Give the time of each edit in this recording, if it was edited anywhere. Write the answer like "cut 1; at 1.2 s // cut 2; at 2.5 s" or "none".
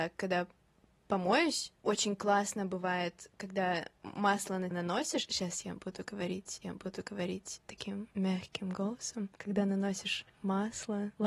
cut 1; at 4.7 s // cut 2; at 6.6 s